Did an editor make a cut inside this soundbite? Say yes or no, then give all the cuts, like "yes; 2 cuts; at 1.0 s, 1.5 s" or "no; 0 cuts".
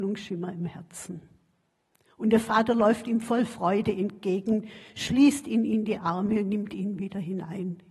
no; 0 cuts